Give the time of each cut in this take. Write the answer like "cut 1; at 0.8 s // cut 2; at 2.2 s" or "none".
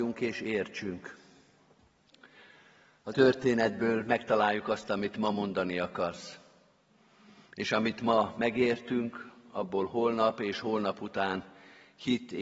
cut 1; at 3.1 s